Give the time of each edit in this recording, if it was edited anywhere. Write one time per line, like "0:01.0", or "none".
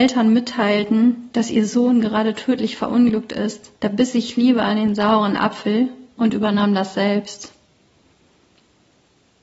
0:03.8